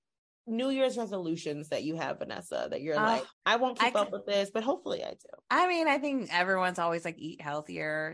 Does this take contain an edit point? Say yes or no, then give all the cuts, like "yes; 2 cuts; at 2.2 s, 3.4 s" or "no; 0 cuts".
yes; 1 cut; at 3.3 s